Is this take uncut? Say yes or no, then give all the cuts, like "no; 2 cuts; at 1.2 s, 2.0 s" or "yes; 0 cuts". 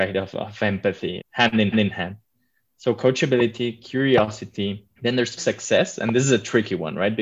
no; 4 cuts; at 1.2 s, 1.7 s, 5.0 s, 5.4 s